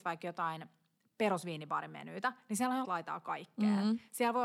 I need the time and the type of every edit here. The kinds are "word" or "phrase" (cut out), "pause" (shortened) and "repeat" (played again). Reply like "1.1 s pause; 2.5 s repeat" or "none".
2.8 s word